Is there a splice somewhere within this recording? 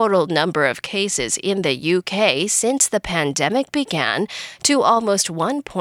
no; 0 cuts

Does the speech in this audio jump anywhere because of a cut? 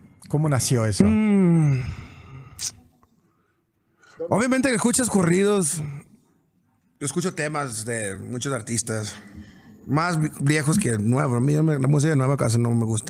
no; 0 cuts

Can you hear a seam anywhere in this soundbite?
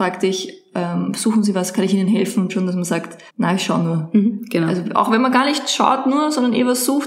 yes; 2 cuts; at 2.5 s, 3.3 s

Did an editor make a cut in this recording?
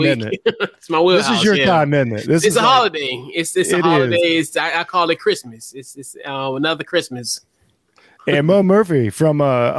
no; 0 cuts

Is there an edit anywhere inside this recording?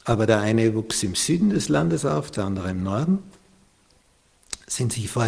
no; 0 cuts

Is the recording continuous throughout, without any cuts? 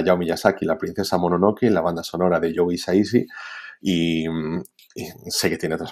yes; 0 cuts

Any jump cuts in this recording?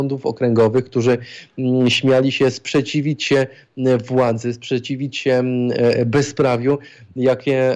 no; 0 cuts

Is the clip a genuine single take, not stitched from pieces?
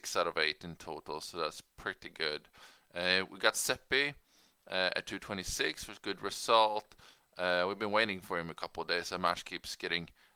yes; 0 cuts

